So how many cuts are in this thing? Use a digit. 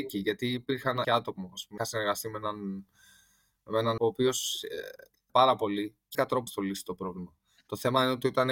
6